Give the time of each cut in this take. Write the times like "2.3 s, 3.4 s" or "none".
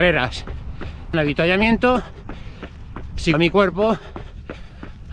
1.1 s, 3.3 s